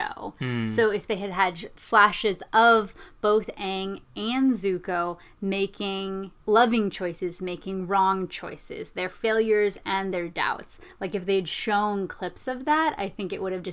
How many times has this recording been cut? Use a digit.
1